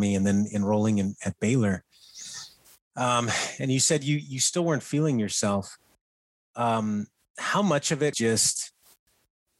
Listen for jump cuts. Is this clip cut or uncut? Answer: cut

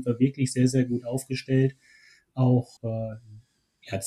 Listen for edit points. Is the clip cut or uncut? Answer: cut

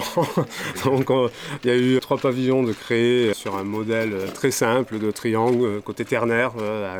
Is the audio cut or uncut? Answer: cut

